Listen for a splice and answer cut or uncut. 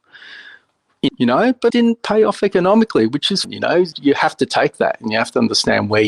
cut